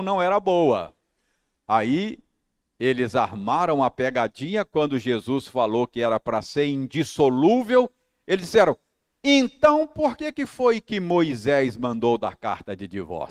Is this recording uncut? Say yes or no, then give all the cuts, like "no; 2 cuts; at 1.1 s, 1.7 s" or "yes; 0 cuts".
yes; 0 cuts